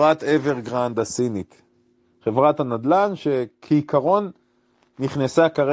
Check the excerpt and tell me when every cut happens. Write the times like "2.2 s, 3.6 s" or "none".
none

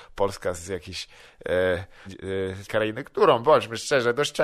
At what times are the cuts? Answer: 2.1 s, 2.7 s

